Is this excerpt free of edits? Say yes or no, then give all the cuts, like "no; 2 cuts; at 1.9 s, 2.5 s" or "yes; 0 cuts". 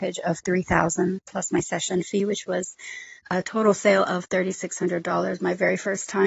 yes; 0 cuts